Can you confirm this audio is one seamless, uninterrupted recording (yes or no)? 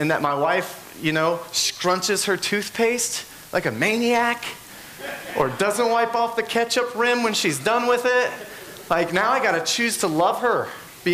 yes